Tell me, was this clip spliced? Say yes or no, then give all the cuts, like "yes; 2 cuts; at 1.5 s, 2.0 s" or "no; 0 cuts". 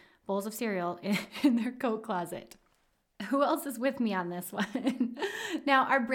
no; 0 cuts